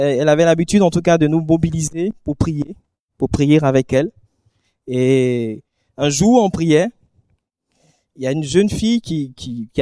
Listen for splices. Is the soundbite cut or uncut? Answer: uncut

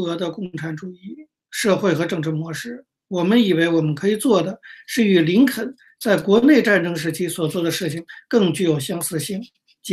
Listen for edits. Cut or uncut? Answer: uncut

